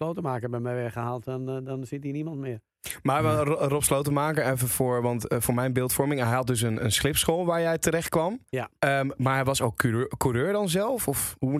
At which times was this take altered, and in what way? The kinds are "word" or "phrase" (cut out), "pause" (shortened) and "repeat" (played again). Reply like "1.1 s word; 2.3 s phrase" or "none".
8.5 s pause